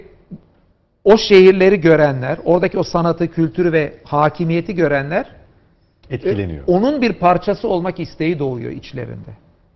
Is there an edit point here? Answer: no; 0 cuts

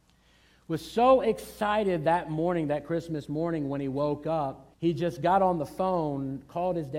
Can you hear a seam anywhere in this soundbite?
yes; 1 cut; at 4.7 s

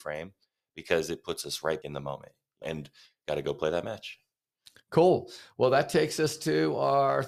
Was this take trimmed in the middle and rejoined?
yes; 2 cuts; at 1.8 s, 2.6 s

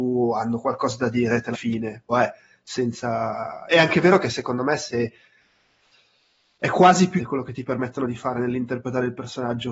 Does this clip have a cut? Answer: yes; 3 cuts; at 1.5 s, 2.1 s, 7.2 s

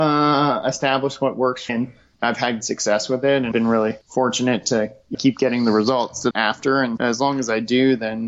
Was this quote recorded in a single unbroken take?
no; 7 cuts; at 1.7 s, 2.1 s, 2.6 s, 3.5 s, 5.1 s, 6.3 s, 7.0 s

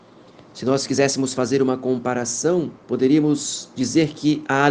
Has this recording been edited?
yes; 1 cut; at 2.8 s

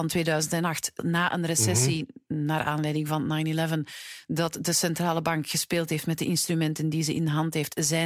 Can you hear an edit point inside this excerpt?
no; 0 cuts

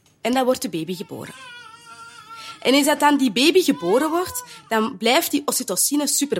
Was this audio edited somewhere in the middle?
no; 0 cuts

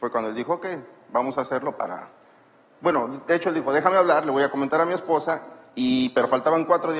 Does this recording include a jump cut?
no; 0 cuts

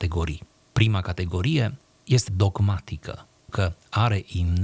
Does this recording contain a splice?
yes; 2 cuts; at 2.3 s, 3.5 s

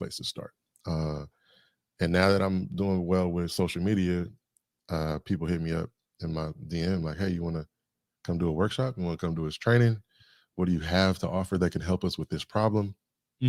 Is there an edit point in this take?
no; 0 cuts

